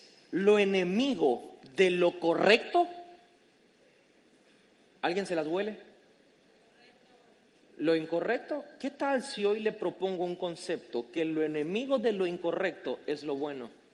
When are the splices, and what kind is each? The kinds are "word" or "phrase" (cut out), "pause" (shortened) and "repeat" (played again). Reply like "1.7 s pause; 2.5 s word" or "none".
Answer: none

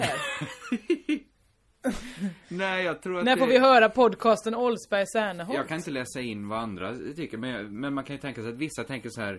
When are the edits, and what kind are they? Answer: none

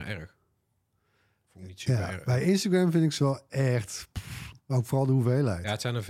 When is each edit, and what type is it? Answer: 4.6 s pause

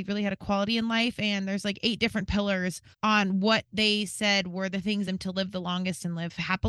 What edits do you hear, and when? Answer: 2.9 s pause; 5.0 s phrase

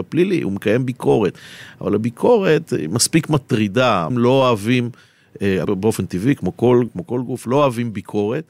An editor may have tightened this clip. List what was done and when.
4.1 s word; 5.6 s phrase; 6.9 s word

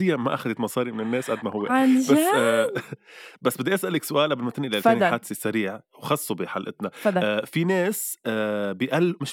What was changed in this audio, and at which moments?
1.7 s word

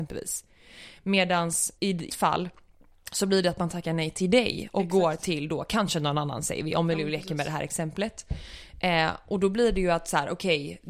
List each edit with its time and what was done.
1.8 s word; 2.1 s word

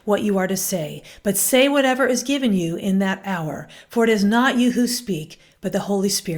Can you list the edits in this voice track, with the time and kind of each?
none

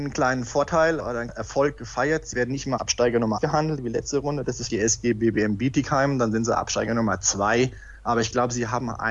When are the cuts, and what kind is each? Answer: 1.3 s word; 2.8 s word; 3.4 s word; 4.7 s word

